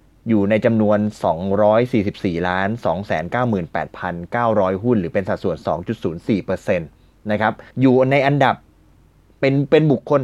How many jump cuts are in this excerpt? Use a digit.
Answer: 1